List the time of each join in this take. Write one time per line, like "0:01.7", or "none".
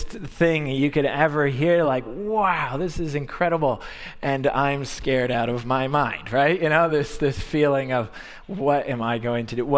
none